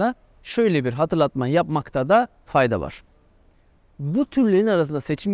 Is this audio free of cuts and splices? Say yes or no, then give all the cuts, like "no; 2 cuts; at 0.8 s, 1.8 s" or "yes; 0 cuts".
yes; 0 cuts